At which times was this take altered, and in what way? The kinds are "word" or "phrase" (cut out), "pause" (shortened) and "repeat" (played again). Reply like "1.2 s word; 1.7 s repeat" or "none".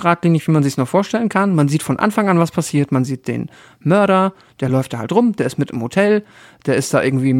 none